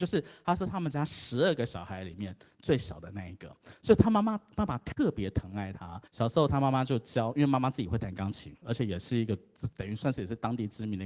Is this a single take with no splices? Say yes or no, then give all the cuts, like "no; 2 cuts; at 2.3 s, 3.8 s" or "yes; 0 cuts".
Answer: no; 1 cut; at 6.1 s